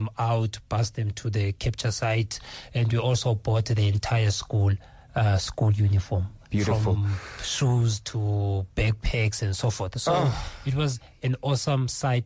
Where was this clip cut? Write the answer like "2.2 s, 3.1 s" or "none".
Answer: none